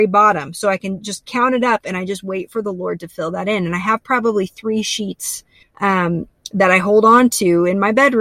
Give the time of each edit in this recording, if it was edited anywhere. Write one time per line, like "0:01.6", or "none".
0:05.6